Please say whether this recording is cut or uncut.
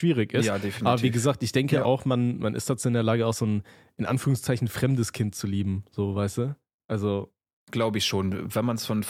uncut